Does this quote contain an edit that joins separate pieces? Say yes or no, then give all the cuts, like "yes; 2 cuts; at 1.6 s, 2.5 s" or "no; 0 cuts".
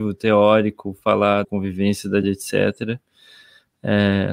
yes; 2 cuts; at 1.4 s, 2.2 s